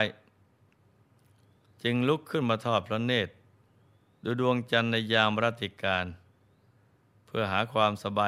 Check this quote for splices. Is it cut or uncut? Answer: uncut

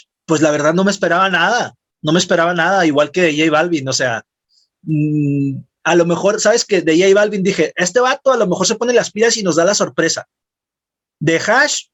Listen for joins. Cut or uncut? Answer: uncut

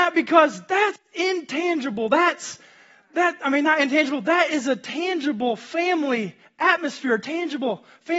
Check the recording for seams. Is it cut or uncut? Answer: uncut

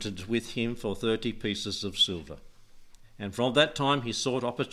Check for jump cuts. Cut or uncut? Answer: uncut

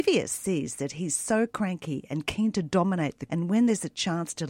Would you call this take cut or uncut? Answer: cut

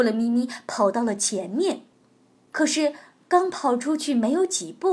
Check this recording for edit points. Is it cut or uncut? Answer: uncut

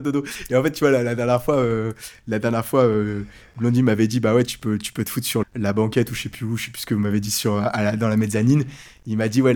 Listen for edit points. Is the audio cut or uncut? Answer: cut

